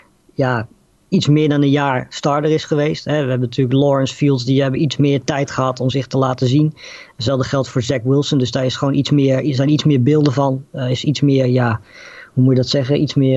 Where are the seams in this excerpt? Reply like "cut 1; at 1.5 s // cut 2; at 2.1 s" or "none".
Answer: none